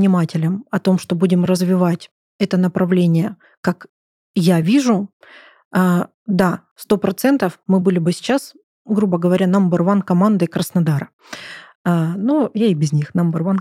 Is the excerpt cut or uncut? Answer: uncut